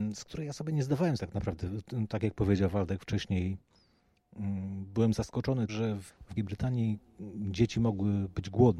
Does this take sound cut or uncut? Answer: cut